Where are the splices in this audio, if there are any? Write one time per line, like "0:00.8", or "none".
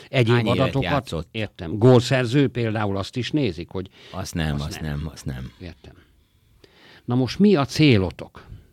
none